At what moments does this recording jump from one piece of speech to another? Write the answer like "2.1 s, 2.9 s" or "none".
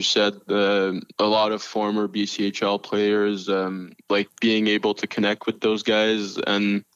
1.1 s, 4.0 s